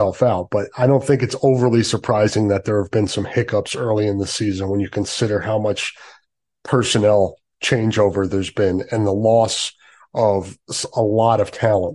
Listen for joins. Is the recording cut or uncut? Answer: uncut